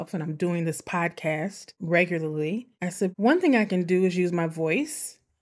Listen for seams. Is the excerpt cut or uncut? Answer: uncut